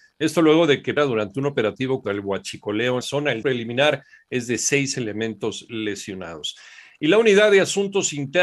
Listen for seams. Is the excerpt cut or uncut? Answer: cut